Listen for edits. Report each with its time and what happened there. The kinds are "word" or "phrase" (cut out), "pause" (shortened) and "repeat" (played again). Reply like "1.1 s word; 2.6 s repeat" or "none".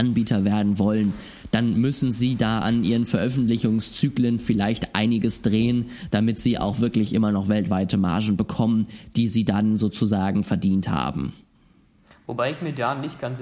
none

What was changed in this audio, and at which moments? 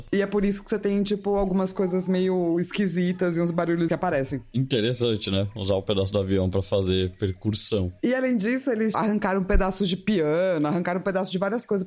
3.9 s word; 8.9 s word

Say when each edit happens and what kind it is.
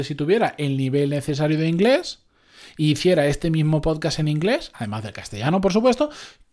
none

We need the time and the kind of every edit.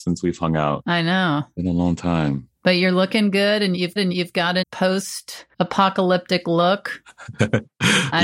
2.6 s pause; 4.0 s repeat; 4.6 s word; 5.5 s pause

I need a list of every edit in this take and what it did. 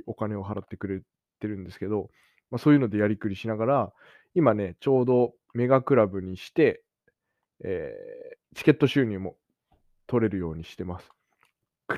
8.4 s pause

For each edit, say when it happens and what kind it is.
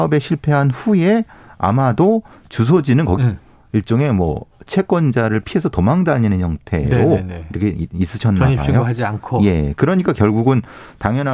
3.2 s word

